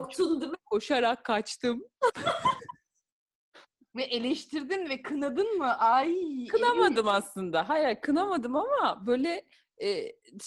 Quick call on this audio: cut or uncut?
uncut